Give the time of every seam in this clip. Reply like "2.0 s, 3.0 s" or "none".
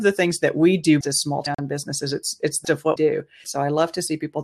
1.0 s, 2.6 s, 3.0 s, 3.4 s